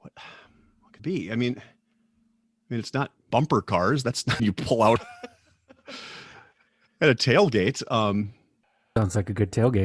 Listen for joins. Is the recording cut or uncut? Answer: cut